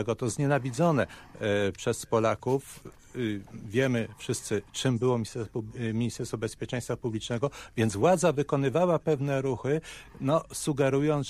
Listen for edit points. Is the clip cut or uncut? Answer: uncut